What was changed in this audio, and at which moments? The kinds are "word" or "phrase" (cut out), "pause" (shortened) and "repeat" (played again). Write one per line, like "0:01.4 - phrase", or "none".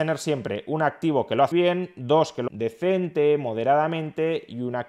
0:01.5 - word
0:02.5 - word